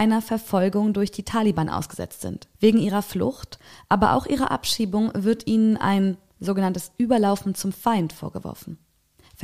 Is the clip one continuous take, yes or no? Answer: no